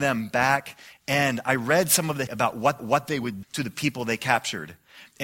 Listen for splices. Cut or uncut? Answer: cut